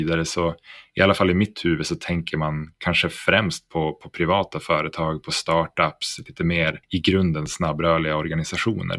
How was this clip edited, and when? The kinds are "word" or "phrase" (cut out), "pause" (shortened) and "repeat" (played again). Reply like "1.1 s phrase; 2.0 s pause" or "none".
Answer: 6.8 s pause